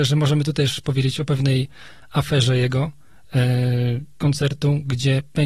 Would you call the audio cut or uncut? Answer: cut